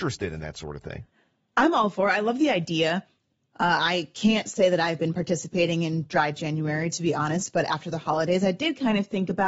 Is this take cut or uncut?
uncut